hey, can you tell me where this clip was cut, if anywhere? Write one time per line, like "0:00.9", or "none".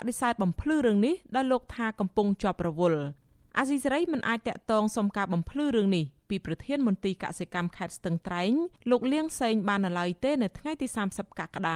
none